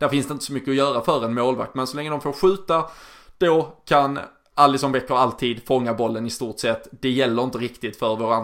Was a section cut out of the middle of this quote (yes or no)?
no